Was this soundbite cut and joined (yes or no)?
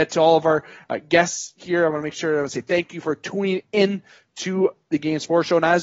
no